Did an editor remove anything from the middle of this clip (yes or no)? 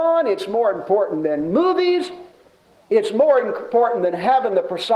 no